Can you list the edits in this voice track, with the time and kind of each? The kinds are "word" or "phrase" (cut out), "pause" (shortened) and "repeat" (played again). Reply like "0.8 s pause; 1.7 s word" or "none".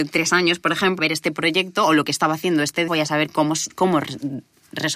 1.0 s word; 2.9 s word